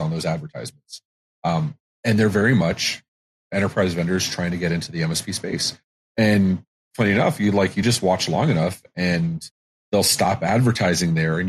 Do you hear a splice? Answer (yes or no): yes